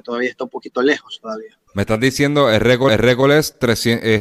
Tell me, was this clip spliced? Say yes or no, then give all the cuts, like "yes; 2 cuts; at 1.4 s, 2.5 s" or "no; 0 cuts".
yes; 2 cuts; at 1.7 s, 2.9 s